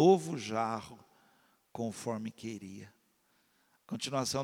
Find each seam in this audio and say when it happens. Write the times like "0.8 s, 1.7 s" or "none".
none